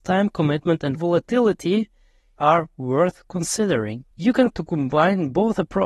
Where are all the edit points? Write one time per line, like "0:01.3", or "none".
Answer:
0:00.9
0:02.4
0:04.1
0:04.5